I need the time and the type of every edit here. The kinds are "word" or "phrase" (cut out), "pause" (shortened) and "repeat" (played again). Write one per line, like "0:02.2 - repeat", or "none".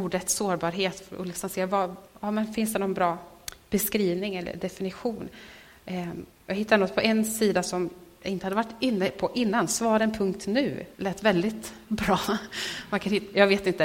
0:02.1 - pause
0:06.3 - pause
0:10.9 - pause

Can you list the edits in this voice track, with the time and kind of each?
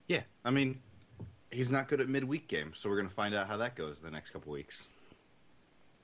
0:01.4 - pause

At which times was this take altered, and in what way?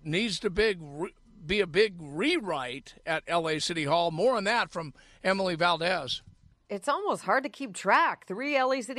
none

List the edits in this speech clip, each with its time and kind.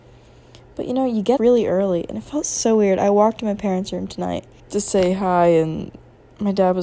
0:01.4 - word
0:04.6 - pause

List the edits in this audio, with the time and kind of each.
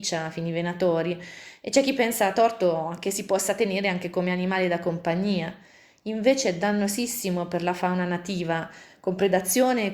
none

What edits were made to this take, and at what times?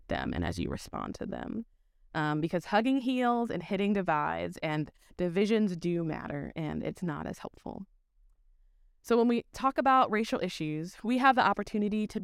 none

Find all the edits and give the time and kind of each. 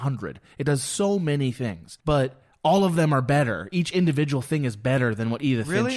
0:02.0 - pause

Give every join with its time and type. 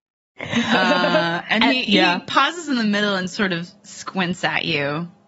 none

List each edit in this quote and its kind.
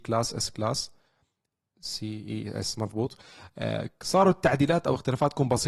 none

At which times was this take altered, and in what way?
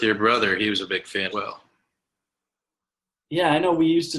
0:01.3 - word

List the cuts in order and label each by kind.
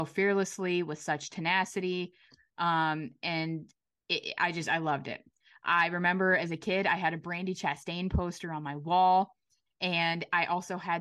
none

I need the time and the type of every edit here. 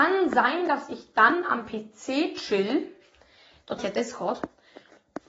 0:03.8 - word

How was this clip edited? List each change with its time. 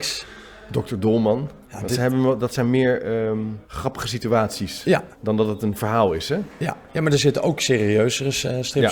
0:01.6 - pause
0:03.6 - pause
0:05.1 - pause
0:06.9 - pause

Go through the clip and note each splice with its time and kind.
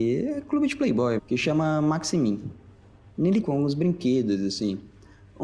0:01.2 - word
0:03.4 - phrase

